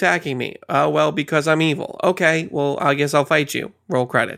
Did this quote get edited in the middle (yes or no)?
no